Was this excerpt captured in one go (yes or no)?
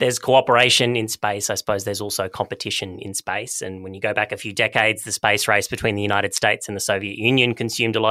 yes